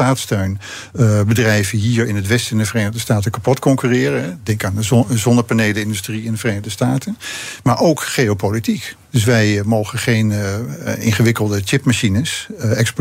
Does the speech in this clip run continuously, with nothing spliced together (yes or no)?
yes